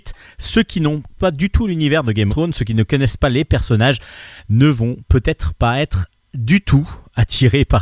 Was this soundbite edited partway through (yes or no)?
yes